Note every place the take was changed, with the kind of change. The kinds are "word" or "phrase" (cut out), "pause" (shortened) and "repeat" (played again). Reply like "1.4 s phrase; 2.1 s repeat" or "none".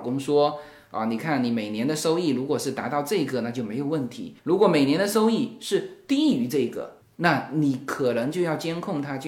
4.4 s pause